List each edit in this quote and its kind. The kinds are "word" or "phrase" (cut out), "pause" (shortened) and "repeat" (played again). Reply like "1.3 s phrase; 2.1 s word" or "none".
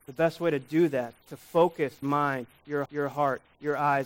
1.2 s word; 2.0 s word; 2.9 s repeat